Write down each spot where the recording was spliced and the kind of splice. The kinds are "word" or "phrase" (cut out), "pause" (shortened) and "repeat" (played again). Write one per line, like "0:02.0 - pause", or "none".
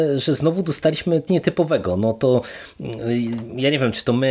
0:01.3 - word